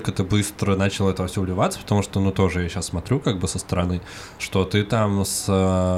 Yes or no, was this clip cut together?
no